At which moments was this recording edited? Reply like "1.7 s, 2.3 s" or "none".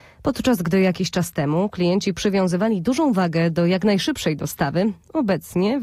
none